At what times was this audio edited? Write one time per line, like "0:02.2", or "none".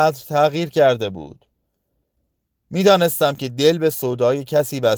none